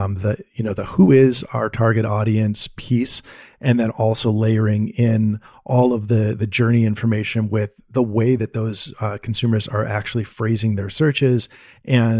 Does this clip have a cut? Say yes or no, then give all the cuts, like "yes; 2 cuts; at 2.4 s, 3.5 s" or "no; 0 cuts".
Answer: no; 0 cuts